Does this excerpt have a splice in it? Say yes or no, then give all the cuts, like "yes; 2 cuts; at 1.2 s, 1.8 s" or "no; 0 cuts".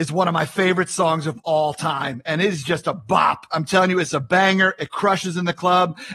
no; 0 cuts